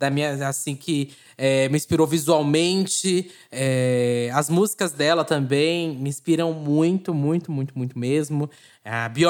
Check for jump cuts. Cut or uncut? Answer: uncut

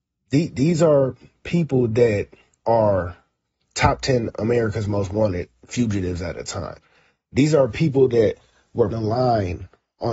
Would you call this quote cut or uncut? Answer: cut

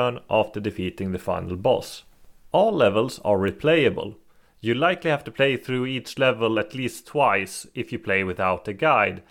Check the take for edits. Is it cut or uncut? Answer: uncut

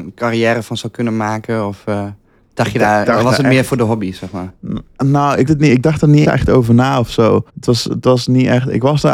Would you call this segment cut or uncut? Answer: cut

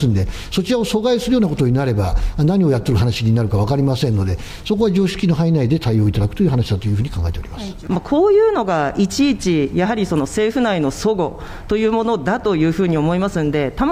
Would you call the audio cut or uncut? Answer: uncut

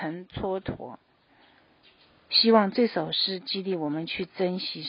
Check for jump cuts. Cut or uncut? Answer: uncut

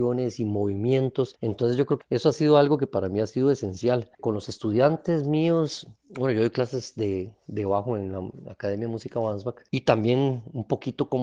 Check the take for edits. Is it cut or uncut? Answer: cut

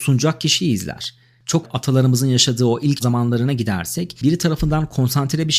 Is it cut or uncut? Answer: cut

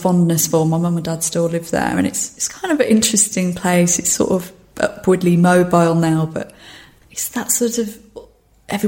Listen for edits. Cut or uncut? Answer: uncut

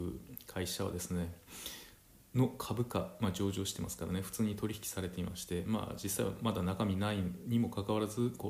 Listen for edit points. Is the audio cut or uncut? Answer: uncut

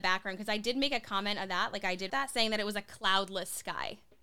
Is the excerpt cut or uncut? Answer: cut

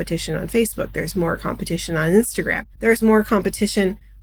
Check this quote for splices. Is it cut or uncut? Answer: cut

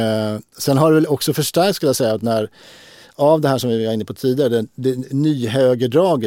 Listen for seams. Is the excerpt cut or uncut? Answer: uncut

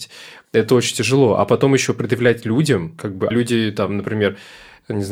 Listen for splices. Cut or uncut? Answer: cut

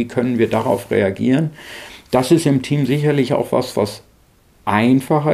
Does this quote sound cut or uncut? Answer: uncut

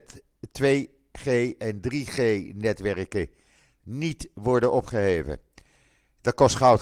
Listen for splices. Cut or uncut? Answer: uncut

